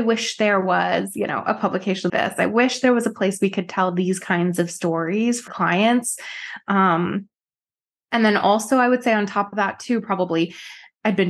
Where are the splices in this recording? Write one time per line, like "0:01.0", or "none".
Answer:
0:02.1
0:05.5